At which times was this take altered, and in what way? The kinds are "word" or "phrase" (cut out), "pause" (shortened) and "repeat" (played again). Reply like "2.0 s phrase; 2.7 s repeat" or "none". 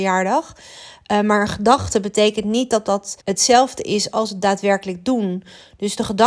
3.2 s pause